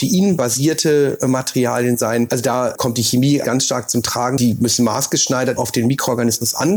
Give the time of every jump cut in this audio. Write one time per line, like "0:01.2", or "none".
0:05.6

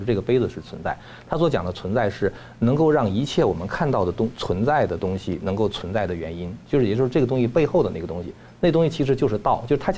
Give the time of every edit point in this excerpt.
none

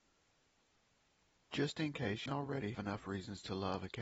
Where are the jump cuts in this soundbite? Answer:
0:02.3
0:02.7

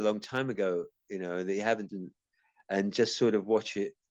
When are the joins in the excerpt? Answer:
0:01.9

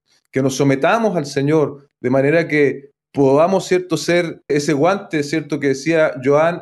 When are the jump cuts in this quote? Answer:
0:04.5

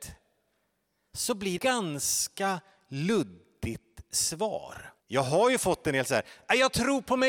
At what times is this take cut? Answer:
0:01.6
0:05.0

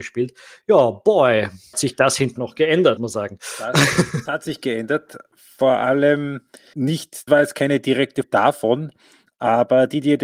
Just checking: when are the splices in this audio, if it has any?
0:01.7
0:02.4
0:03.0
0:04.3
0:06.7
0:07.3
0:08.2

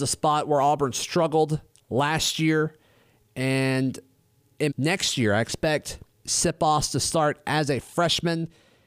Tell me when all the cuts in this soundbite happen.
0:04.7
0:06.1

